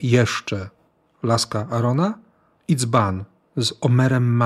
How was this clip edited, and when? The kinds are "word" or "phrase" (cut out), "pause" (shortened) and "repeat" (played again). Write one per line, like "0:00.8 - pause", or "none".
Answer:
none